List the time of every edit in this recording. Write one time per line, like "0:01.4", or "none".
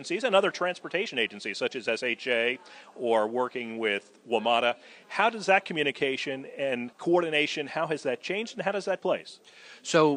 0:09.0